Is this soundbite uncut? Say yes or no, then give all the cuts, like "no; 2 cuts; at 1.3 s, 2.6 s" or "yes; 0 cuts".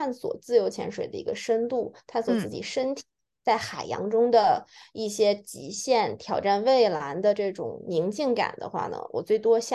yes; 0 cuts